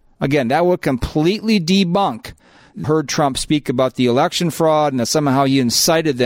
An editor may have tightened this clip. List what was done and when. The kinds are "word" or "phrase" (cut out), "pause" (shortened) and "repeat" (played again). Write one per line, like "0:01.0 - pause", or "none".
0:02.8 - phrase